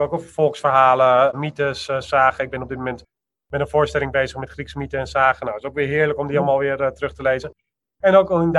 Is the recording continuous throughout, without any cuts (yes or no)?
yes